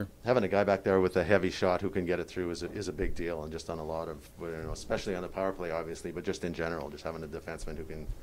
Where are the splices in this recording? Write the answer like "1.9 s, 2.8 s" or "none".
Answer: 4.3 s